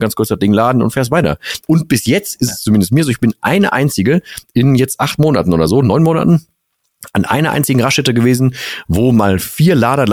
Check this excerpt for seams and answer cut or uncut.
uncut